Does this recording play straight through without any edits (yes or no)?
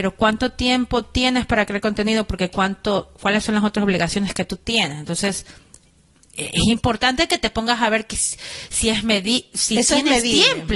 yes